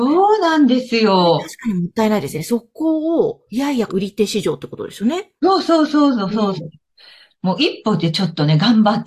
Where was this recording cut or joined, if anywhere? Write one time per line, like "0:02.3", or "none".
0:03.5
0:03.9
0:06.6